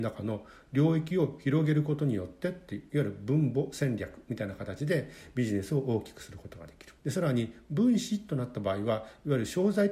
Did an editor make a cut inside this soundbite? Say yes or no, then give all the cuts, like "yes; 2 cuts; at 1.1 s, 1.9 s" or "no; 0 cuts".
yes; 1 cut; at 7.0 s